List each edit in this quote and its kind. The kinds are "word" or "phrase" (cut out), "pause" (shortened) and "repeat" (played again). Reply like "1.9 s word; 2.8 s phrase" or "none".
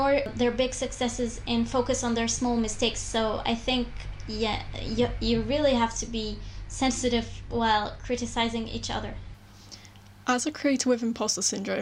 none